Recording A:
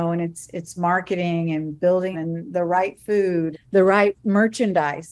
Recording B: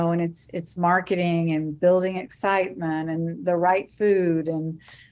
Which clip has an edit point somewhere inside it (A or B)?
A